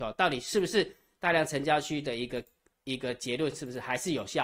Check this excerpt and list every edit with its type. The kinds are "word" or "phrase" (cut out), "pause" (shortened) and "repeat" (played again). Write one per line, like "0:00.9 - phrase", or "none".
none